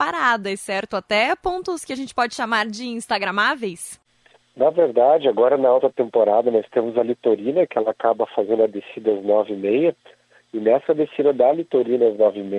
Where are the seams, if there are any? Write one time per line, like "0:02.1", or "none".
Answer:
none